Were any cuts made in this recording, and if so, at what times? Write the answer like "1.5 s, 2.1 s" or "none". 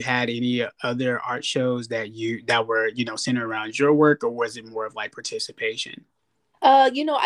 none